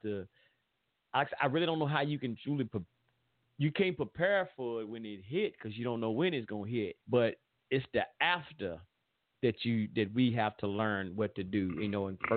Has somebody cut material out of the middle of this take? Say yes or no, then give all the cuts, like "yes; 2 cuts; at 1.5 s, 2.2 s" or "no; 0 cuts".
yes; 1 cut; at 7.0 s